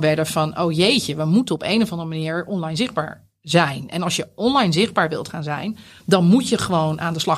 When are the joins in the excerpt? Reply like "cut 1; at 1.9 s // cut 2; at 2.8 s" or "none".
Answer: none